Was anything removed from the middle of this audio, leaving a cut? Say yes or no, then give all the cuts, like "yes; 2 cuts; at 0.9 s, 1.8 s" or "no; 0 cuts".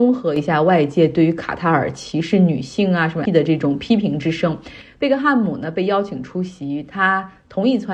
yes; 1 cut; at 3.2 s